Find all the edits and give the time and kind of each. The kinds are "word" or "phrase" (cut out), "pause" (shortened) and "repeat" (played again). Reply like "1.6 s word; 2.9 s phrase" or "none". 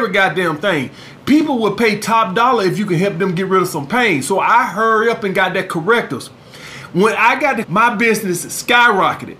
7.6 s word